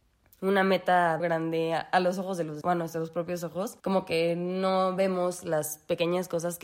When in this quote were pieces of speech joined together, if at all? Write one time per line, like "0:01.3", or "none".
0:01.2
0:02.6
0:03.8